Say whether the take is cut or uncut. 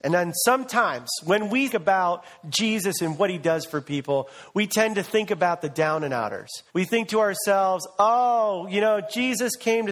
cut